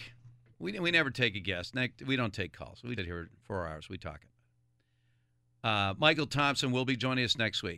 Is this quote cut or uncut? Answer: cut